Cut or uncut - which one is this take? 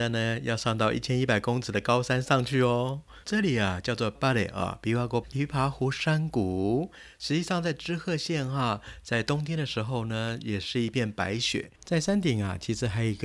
cut